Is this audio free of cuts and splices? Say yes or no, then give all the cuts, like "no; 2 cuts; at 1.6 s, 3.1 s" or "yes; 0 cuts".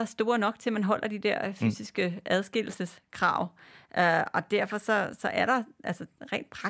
yes; 0 cuts